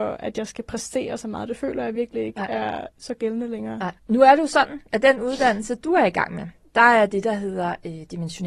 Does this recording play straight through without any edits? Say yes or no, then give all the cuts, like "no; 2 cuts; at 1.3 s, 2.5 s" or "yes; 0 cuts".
no; 1 cut; at 4.0 s